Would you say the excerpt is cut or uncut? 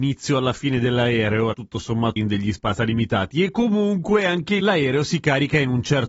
cut